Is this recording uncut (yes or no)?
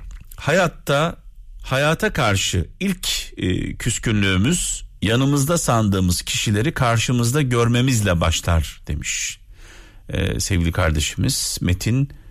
yes